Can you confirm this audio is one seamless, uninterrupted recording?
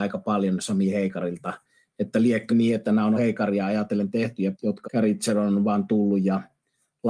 no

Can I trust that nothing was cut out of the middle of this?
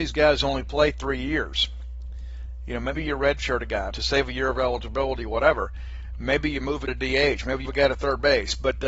no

